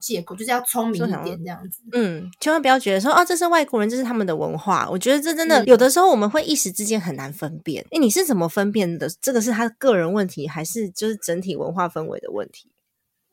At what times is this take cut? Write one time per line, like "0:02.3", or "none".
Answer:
0:05.6
0:07.9